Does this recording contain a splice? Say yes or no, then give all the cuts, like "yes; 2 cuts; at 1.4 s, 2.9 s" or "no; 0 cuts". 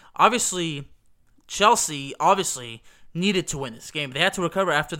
no; 0 cuts